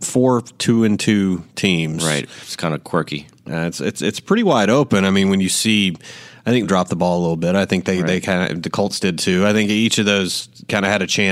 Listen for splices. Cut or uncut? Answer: cut